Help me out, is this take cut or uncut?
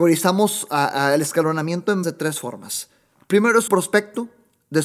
cut